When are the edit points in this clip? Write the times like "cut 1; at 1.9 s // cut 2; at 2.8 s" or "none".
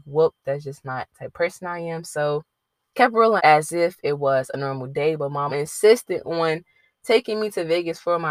cut 1; at 2.9 s // cut 2; at 3.4 s // cut 3; at 5.5 s